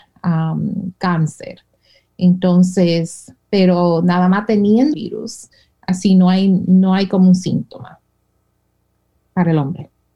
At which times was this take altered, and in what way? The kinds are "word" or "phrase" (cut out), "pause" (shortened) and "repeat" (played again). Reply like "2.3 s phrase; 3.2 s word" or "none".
4.9 s word; 5.7 s word